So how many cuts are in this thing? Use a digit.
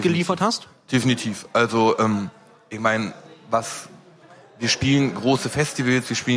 0